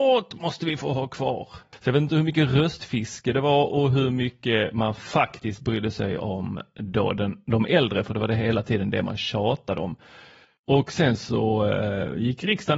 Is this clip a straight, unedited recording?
yes; 0 cuts

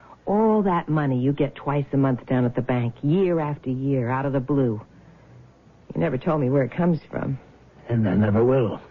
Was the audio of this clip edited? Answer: no; 0 cuts

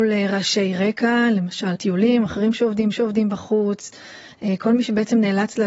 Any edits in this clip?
yes; 3 cuts; at 1.8 s, 2.3 s, 2.9 s

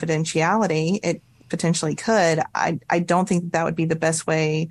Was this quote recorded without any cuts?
yes; 0 cuts

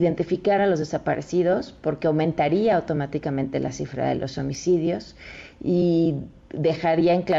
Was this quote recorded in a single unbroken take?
yes; 0 cuts

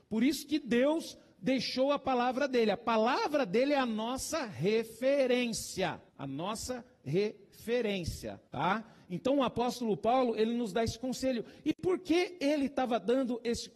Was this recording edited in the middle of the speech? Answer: yes; 2 cuts; at 6.1 s, 8.5 s

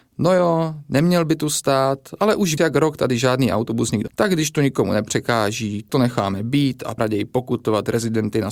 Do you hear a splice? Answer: yes; 4 cuts; at 2.6 s, 4.1 s, 5.9 s, 7.0 s

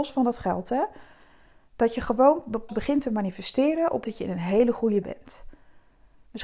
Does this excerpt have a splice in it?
yes; 3 cuts; at 2.7 s, 4.0 s, 5.0 s

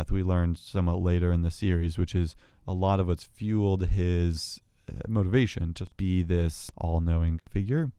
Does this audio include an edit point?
no; 0 cuts

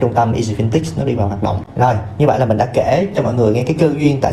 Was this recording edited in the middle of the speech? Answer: no; 0 cuts

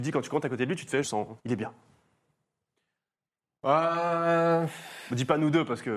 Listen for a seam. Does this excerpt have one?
yes; 2 cuts; at 1.0 s, 1.4 s

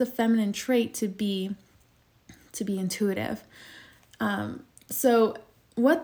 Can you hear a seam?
no; 0 cuts

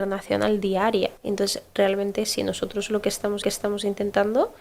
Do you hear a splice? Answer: yes; 2 cuts; at 1.2 s, 3.4 s

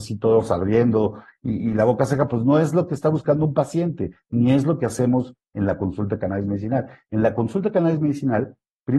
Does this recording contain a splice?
no; 0 cuts

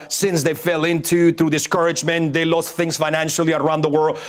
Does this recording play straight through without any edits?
yes; 0 cuts

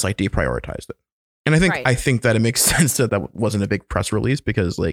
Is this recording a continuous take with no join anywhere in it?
no; 1 cut; at 3.1 s

